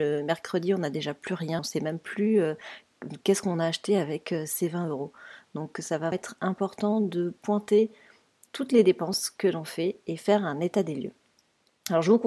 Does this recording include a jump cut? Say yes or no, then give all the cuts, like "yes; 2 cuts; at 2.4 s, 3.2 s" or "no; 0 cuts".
yes; 2 cuts; at 1.6 s, 6.1 s